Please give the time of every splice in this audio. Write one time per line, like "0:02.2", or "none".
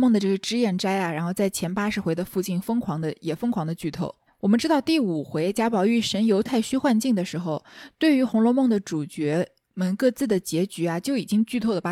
0:04.3